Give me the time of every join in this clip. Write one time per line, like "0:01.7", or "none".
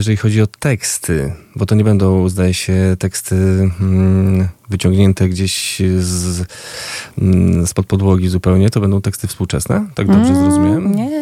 0:04.6